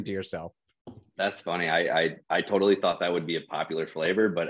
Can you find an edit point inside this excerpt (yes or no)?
yes